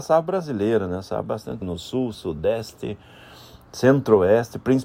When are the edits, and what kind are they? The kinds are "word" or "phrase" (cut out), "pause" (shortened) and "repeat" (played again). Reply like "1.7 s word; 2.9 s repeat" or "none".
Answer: 1.2 s word; 1.6 s word; 2.1 s word